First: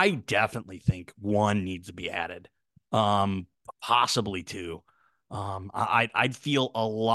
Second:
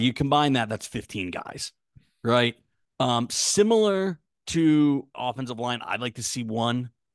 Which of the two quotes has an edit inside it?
second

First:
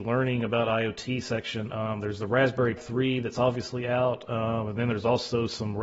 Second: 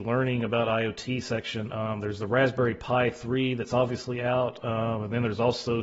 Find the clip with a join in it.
first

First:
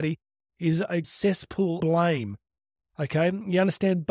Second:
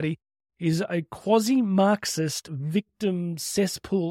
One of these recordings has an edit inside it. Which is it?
first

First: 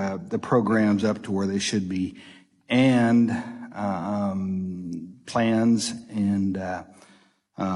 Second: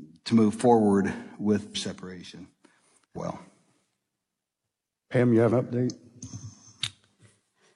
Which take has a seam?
second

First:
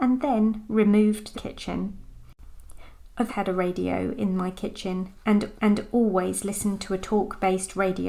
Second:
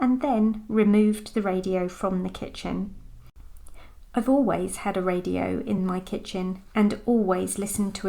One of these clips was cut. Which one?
first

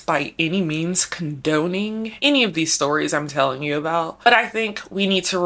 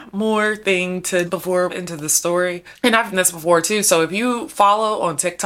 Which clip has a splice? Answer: second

